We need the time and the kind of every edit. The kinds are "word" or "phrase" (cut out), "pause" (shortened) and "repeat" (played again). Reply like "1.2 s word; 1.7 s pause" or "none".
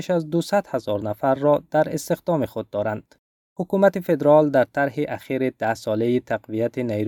none